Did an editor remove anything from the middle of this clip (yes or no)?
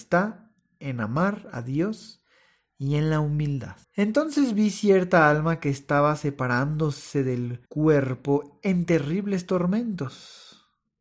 yes